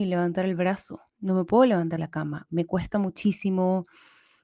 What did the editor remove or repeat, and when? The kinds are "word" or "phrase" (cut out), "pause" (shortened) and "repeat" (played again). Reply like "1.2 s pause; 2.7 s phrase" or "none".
1.1 s pause; 2.0 s word